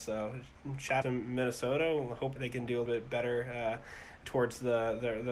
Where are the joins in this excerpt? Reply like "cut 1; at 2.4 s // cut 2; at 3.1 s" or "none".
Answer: cut 1; at 1.0 s // cut 2; at 2.4 s // cut 3; at 2.9 s // cut 4; at 4.2 s